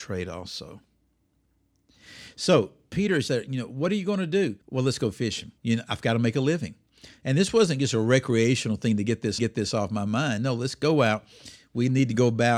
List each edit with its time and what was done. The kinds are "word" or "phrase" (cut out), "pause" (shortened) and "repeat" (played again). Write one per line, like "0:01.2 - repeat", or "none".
0:03.3 - word
0:04.6 - pause
0:05.6 - pause
0:09.4 - repeat